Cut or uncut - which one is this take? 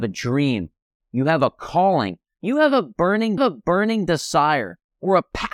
cut